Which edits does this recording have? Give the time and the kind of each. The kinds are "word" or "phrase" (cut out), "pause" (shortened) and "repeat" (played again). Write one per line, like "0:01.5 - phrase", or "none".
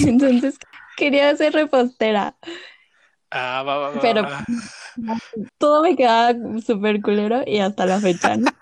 0:05.5 - pause